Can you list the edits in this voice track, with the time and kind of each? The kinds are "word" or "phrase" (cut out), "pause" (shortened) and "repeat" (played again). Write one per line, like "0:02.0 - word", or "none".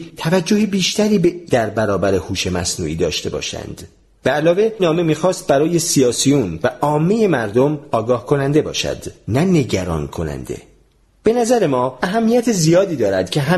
0:01.5 - word
0:04.8 - word